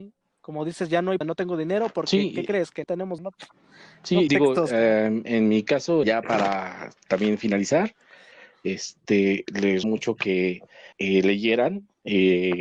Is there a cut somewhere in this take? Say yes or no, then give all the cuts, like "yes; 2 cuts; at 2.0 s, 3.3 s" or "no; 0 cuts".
yes; 7 cuts; at 1.2 s, 2.8 s, 3.2 s, 4.3 s, 6.0 s, 9.8 s, 10.9 s